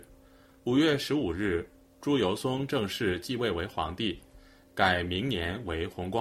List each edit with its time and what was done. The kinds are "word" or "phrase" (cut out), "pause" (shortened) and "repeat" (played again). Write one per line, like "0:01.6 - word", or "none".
none